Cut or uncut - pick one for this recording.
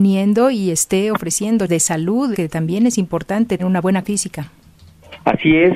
cut